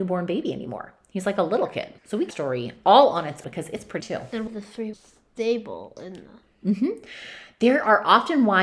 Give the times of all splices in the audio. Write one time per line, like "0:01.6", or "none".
0:02.0
0:02.3
0:03.4
0:04.0
0:04.5
0:04.9